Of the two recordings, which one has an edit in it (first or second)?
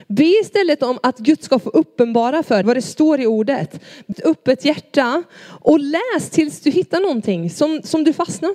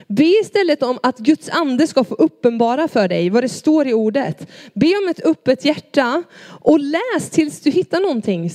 first